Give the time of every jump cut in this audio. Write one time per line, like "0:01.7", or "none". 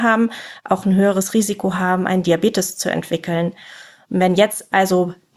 none